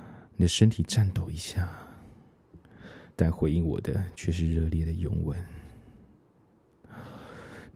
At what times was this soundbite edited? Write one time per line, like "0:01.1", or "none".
0:03.1